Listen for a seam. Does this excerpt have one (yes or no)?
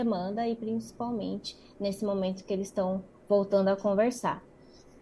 no